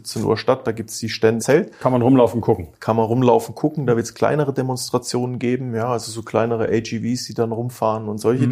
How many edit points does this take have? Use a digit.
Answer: 1